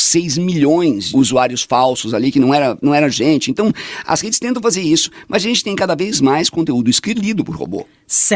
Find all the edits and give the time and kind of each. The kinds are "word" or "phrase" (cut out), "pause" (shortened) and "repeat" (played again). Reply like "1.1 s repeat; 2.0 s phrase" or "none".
1.1 s word; 7.1 s phrase